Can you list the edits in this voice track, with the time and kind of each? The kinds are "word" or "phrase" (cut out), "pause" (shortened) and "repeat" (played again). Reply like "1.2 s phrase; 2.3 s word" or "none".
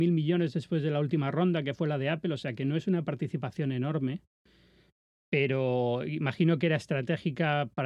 none